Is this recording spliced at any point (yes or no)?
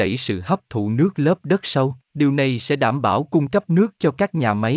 yes